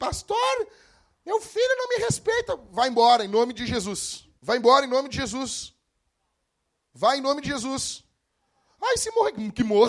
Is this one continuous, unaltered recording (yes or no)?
no